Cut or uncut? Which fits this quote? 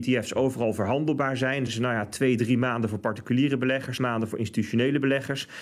cut